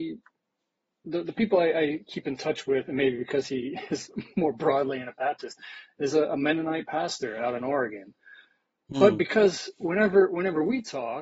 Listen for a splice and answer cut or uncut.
uncut